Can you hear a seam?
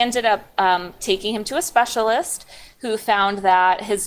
no; 0 cuts

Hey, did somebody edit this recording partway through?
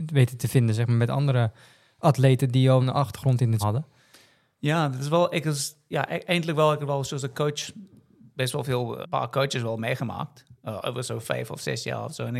yes; 3 cuts; at 2.8 s, 3.6 s, 9.0 s

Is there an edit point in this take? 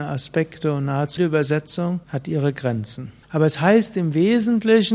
yes; 3 cuts; at 1.2 s, 2.0 s, 3.2 s

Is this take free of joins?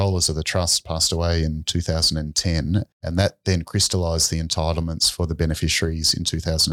no; 1 cut; at 2.9 s

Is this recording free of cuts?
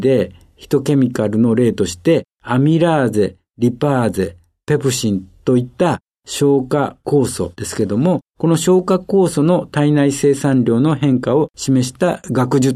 yes; 0 cuts

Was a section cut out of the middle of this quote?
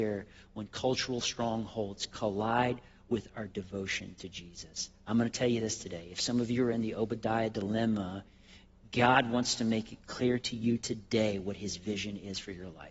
no; 0 cuts

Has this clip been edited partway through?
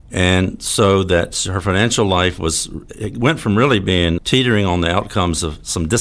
yes; 1 cut; at 4.2 s

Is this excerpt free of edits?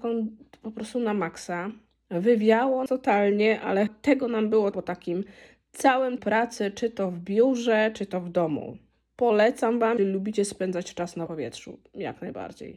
no; 6 cuts; at 2.9 s, 3.9 s, 4.7 s, 6.2 s, 10.0 s, 11.3 s

